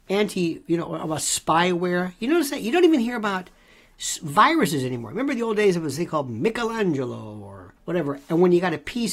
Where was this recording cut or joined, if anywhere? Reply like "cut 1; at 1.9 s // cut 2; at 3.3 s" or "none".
cut 1; at 7.8 s